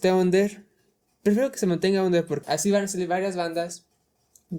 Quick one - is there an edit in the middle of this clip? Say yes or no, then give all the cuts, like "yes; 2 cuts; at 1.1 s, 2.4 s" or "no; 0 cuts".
yes; 1 cut; at 2.4 s